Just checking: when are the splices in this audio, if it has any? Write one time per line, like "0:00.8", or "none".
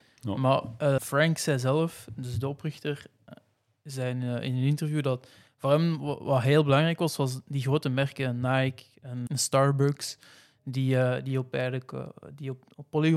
0:01.0
0:09.3